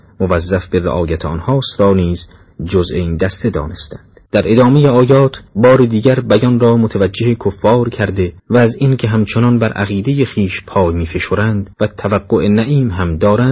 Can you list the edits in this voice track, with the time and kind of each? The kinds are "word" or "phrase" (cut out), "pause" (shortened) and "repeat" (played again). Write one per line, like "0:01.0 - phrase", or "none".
0:04.3 - pause
0:05.5 - pause
0:08.4 - pause
0:11.7 - pause